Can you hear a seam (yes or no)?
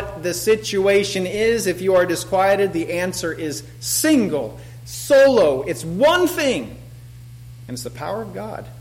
no